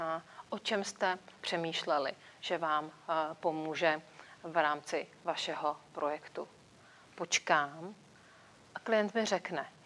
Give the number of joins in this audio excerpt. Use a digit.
0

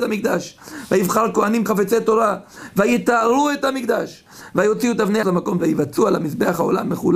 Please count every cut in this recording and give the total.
3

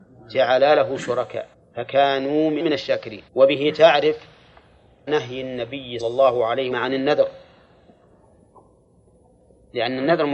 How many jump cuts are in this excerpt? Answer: 6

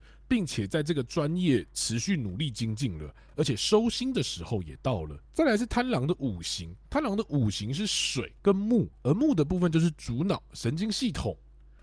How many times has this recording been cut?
3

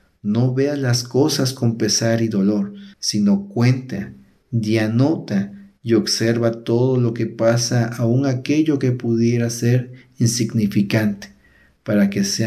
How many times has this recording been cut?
1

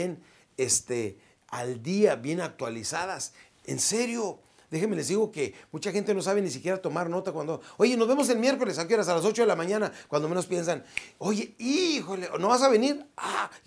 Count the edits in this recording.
0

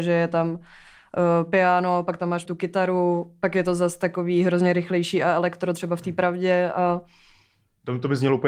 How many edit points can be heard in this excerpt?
1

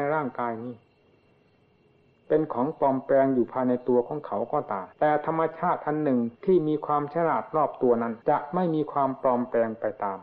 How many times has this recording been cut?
3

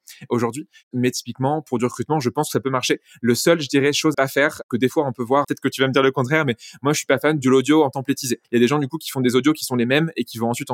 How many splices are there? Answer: 3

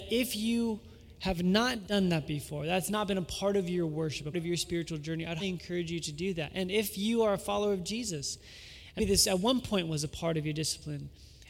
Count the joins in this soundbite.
3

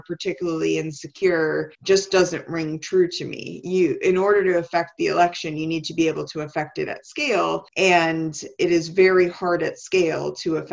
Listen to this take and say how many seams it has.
2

